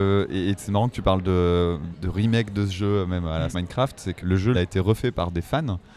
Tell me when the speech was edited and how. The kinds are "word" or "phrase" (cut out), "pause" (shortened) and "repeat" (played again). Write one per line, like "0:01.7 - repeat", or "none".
0:01.9 - word
0:03.5 - word
0:04.2 - word
0:04.5 - phrase